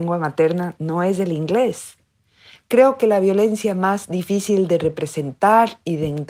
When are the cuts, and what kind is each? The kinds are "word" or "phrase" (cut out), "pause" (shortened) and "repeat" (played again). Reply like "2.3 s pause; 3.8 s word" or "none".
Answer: none